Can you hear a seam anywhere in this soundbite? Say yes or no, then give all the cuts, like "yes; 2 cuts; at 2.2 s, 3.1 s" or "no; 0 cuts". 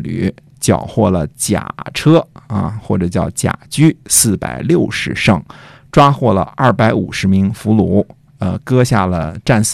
no; 0 cuts